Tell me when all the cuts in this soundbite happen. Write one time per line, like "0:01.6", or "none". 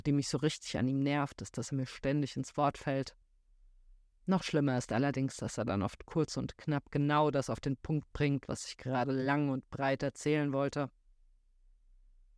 none